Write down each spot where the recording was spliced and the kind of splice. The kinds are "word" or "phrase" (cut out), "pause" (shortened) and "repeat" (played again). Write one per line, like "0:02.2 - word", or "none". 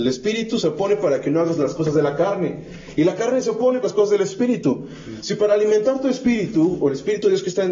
0:03.8 - phrase